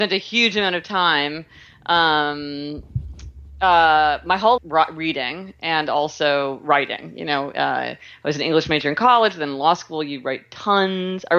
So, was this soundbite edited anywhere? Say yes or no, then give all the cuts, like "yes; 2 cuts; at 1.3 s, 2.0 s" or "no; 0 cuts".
yes; 1 cut; at 4.6 s